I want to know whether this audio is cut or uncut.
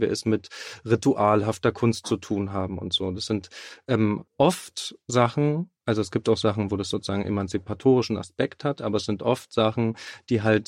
cut